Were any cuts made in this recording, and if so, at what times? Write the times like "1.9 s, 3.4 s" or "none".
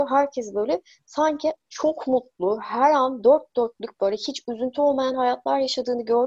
none